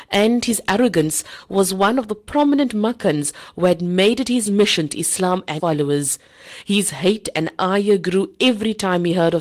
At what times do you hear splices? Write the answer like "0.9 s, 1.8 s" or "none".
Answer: 4.9 s, 5.6 s